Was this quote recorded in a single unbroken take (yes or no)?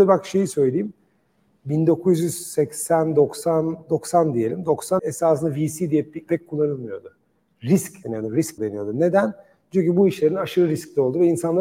no